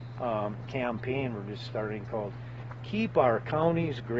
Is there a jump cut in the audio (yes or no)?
no